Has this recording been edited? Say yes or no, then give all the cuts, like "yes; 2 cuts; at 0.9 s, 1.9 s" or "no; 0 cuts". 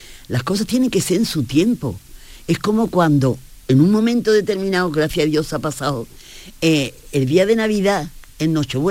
yes; 1 cut; at 3.6 s